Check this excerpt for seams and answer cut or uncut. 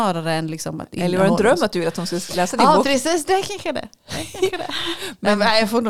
uncut